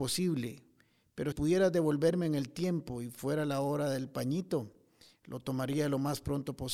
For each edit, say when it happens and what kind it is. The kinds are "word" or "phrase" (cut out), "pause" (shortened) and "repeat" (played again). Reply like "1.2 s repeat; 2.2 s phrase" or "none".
1.3 s word